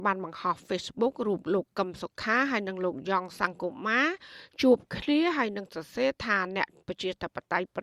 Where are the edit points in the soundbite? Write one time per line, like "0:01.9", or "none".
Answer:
none